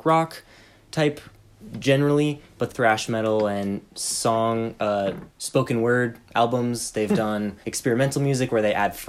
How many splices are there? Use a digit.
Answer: 3